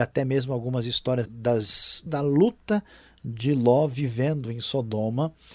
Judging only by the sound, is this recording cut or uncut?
cut